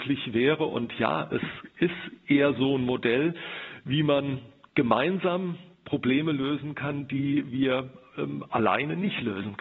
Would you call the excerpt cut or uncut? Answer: uncut